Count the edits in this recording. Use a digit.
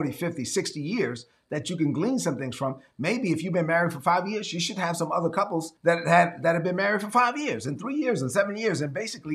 1